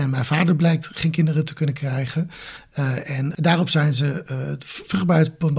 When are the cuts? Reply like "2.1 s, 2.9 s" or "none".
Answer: none